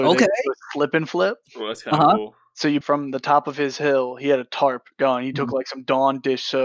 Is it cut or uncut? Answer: cut